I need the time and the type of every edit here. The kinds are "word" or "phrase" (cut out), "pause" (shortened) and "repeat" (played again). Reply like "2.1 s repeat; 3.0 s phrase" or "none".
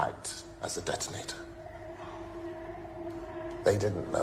none